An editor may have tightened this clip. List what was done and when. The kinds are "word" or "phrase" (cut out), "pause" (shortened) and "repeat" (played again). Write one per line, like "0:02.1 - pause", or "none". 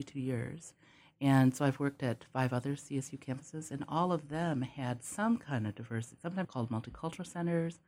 0:06.4 - word

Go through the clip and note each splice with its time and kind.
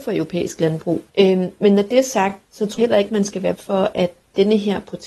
0:01.1 - pause
0:02.4 - pause
0:02.8 - word
0:03.6 - word

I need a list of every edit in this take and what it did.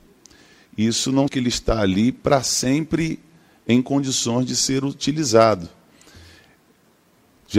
0:01.3 - word

